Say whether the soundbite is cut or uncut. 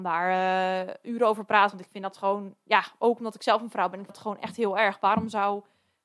cut